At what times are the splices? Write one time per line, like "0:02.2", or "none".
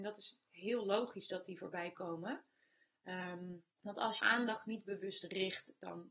0:03.7
0:04.2